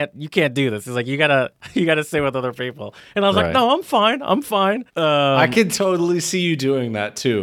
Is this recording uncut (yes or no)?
no